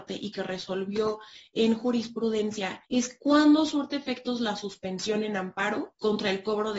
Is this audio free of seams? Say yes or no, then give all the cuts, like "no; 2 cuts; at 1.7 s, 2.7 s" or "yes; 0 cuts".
no; 1 cut; at 2.8 s